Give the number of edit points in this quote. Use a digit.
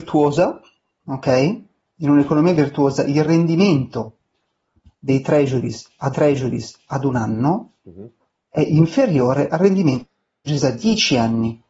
1